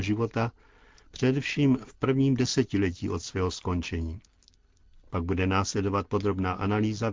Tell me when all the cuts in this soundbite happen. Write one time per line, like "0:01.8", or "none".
none